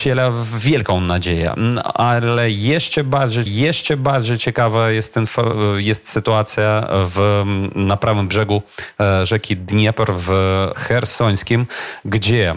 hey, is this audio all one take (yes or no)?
no